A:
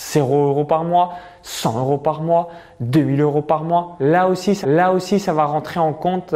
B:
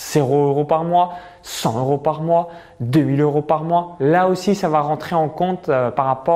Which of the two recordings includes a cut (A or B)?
A